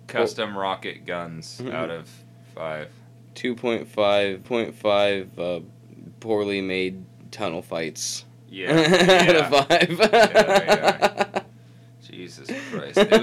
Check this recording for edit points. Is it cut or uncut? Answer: cut